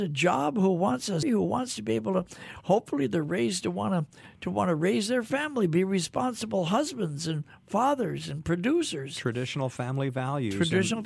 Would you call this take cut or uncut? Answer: cut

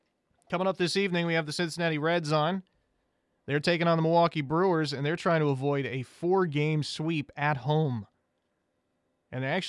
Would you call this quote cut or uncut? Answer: uncut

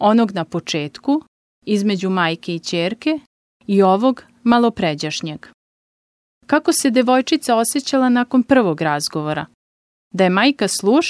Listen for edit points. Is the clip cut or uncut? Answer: uncut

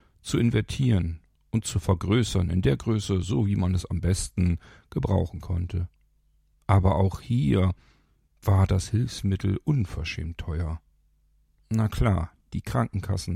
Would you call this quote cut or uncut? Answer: uncut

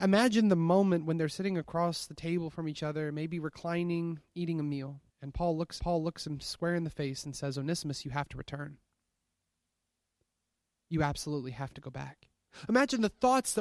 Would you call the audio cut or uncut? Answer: cut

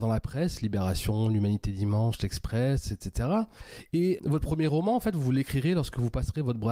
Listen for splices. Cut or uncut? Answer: cut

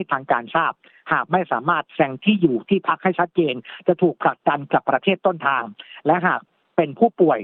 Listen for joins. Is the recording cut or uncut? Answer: uncut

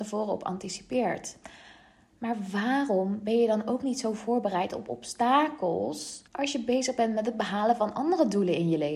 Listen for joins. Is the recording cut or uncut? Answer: cut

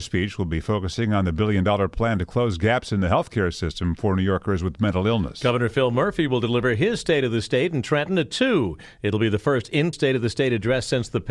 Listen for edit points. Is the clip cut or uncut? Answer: cut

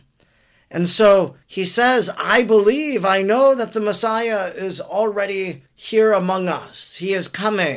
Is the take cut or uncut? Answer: cut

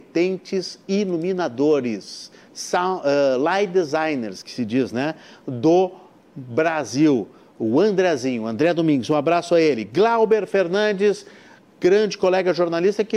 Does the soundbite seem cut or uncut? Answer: uncut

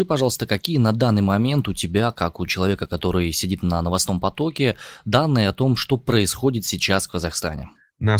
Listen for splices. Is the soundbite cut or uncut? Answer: uncut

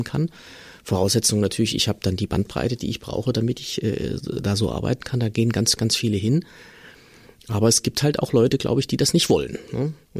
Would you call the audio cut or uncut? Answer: uncut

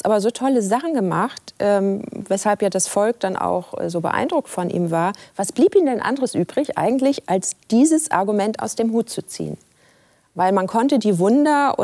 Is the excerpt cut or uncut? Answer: uncut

